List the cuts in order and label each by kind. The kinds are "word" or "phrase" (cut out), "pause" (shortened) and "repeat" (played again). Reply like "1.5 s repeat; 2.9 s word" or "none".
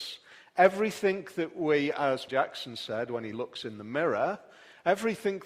2.3 s word